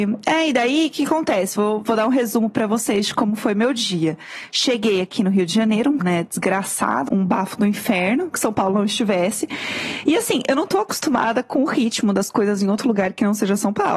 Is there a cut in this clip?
yes; 3 cuts; at 6.0 s, 7.1 s, 8.3 s

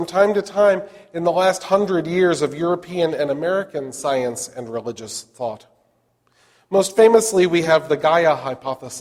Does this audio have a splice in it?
no; 0 cuts

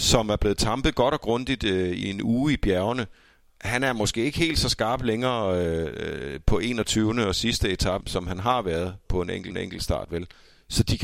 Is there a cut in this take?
yes; 4 cuts; at 2.0 s, 8.0 s, 9.1 s, 9.5 s

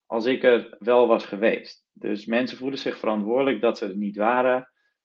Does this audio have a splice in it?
no; 0 cuts

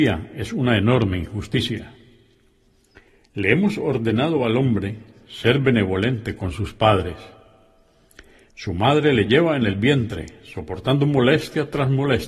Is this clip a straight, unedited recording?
yes; 0 cuts

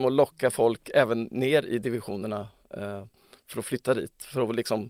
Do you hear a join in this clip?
no; 0 cuts

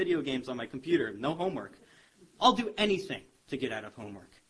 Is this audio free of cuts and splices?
yes; 0 cuts

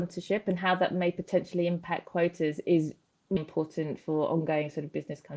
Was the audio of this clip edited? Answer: yes; 1 cut; at 3.4 s

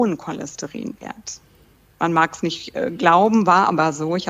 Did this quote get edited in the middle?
no; 0 cuts

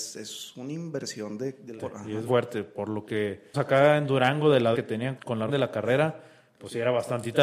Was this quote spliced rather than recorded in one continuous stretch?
yes; 6 cuts; at 1.8 s, 2.3 s, 3.5 s, 4.7 s, 5.2 s, 5.5 s

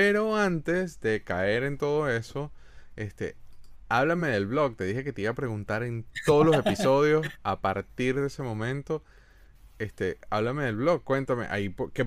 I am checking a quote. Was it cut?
no; 0 cuts

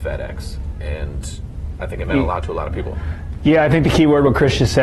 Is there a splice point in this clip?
no; 0 cuts

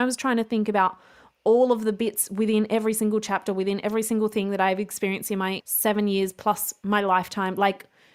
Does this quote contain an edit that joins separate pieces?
no; 0 cuts

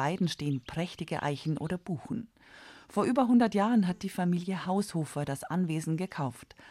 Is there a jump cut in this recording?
no; 0 cuts

